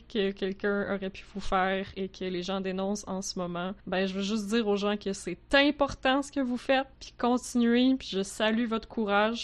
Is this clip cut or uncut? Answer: cut